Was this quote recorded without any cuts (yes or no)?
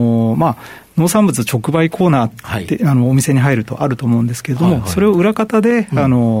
yes